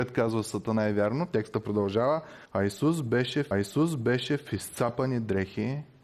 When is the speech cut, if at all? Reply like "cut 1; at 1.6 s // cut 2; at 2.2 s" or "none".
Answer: cut 1; at 2.5 s // cut 2; at 3.5 s